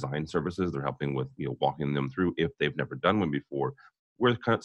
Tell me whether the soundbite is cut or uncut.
uncut